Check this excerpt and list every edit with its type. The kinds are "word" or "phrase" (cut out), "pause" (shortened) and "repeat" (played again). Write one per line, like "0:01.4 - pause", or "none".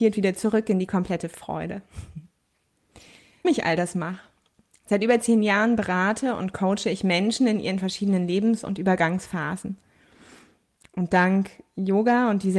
0:03.4 - word